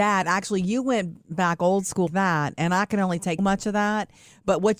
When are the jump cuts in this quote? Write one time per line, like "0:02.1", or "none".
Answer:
0:02.1
0:03.4